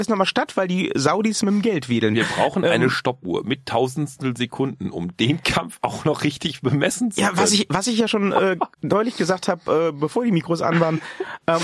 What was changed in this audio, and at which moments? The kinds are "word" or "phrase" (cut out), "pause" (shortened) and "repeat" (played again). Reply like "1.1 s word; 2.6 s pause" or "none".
8.7 s pause